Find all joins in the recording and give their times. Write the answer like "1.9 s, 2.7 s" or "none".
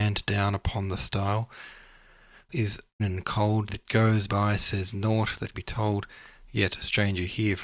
2.5 s, 3.0 s, 3.7 s, 4.3 s, 5.5 s